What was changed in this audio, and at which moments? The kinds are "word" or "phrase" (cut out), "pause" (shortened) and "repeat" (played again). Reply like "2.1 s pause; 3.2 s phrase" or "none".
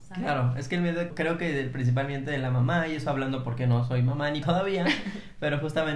1.1 s word; 4.4 s word